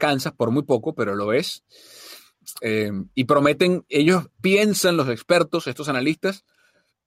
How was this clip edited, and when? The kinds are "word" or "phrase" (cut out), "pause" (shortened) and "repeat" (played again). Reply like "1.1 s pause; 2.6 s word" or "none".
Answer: 4.3 s pause